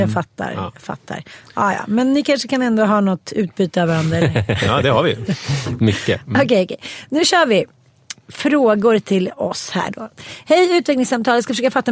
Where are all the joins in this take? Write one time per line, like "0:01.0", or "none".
none